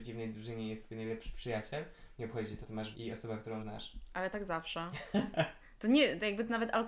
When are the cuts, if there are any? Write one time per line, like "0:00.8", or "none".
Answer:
0:02.6
0:02.9
0:03.6
0:04.3